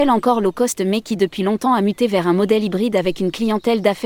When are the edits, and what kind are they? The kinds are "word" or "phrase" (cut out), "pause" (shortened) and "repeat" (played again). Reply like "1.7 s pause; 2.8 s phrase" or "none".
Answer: none